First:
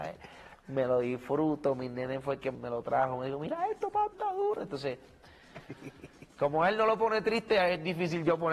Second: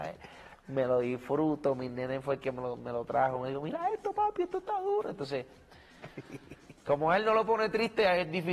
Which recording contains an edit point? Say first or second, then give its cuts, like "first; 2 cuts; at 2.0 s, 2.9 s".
first; 2 cuts; at 2.5 s, 4.1 s